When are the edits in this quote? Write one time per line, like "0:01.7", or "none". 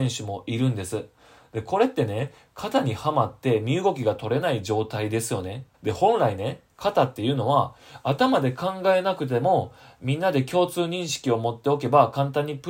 0:05.7